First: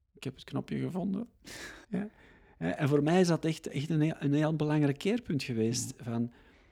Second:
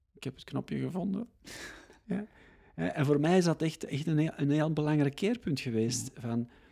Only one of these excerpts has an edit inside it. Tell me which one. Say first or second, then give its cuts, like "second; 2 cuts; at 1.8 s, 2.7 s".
first; 1 cut; at 1.8 s